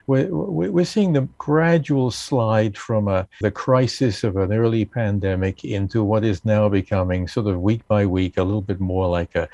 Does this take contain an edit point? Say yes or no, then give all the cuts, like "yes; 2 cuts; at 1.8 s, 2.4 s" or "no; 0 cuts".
yes; 1 cut; at 3.4 s